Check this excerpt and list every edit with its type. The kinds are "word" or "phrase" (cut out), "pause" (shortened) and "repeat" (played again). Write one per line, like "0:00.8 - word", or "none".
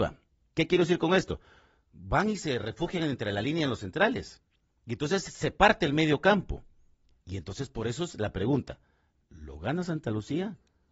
none